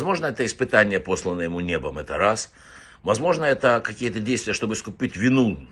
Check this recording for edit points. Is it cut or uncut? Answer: uncut